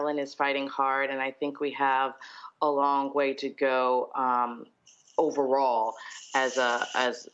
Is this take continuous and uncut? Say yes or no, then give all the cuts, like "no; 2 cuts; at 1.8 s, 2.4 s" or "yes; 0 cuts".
yes; 0 cuts